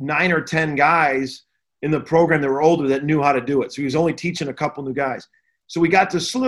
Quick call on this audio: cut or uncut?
uncut